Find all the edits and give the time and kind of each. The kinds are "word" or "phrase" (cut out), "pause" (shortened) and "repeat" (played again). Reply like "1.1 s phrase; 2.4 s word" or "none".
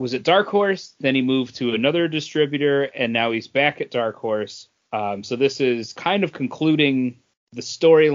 none